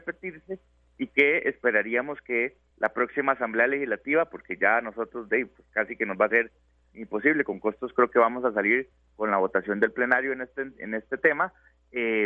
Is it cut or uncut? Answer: uncut